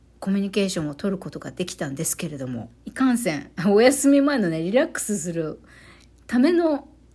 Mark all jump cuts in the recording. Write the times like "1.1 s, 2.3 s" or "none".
2.8 s